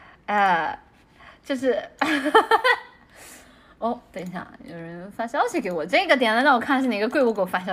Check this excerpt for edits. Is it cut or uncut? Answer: uncut